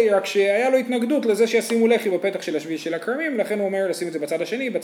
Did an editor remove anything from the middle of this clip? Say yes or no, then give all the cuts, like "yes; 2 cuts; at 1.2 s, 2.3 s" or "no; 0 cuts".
no; 0 cuts